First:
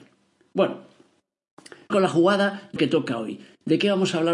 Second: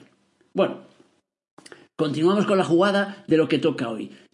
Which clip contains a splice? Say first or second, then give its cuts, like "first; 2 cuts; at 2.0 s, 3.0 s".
first; 2 cuts; at 1.9 s, 2.8 s